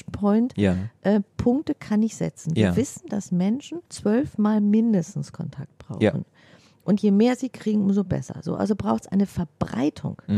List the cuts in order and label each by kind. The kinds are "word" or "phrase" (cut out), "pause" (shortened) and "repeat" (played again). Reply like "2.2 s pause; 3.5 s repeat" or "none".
1.3 s pause; 3.9 s pause